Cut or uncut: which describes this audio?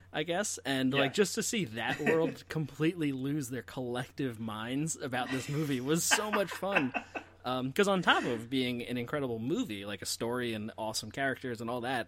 uncut